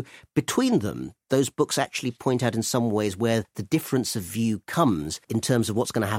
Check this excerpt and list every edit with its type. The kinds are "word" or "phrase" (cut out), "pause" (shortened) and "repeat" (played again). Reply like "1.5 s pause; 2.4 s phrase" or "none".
5.2 s pause